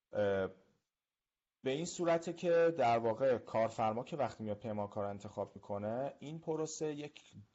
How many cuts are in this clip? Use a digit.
0